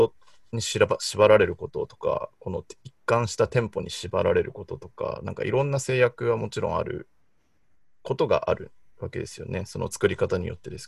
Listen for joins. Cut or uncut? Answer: uncut